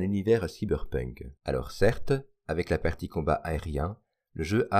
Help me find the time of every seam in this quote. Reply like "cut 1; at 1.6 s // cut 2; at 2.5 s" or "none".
cut 1; at 1.4 s